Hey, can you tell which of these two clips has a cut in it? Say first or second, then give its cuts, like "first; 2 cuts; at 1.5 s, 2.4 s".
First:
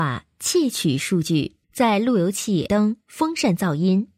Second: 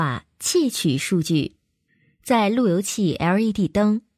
first; 3 cuts; at 1.6 s, 2.7 s, 3.0 s